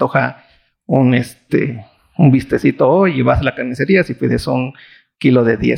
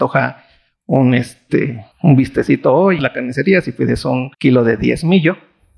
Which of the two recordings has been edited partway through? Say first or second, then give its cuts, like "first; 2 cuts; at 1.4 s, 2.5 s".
second; 3 cuts; at 1.9 s, 3.0 s, 4.3 s